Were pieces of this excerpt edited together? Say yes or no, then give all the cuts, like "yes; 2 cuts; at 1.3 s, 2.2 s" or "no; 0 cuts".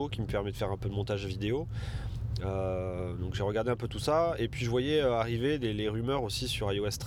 no; 0 cuts